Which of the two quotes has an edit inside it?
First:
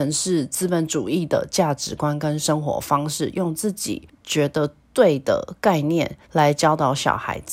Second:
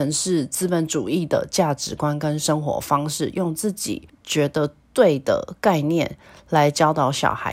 first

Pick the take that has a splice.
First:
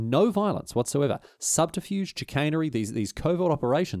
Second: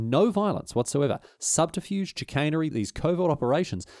second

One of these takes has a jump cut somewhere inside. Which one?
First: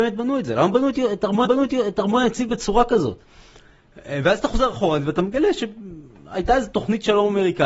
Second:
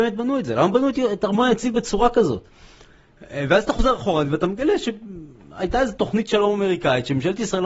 first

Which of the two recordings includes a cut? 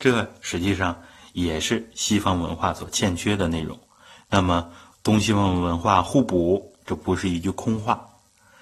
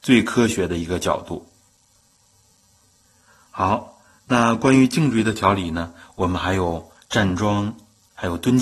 first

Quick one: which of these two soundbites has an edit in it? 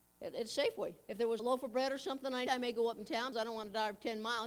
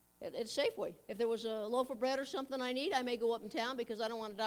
first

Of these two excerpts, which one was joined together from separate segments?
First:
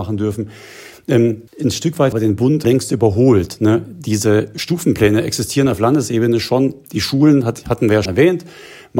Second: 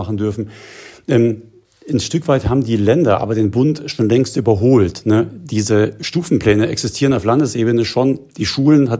first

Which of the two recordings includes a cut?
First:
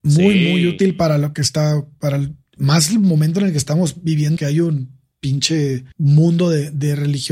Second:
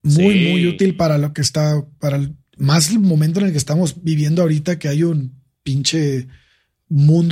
first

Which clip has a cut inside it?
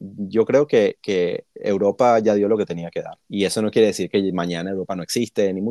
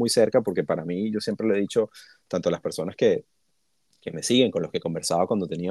first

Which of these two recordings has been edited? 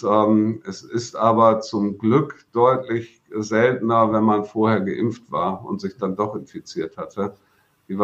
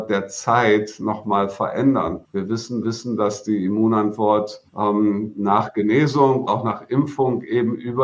second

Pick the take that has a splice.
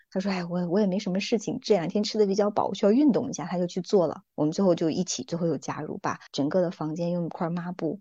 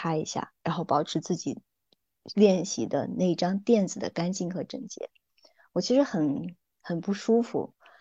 first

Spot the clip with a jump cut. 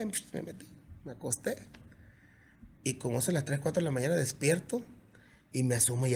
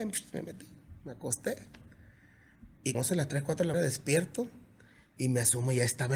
second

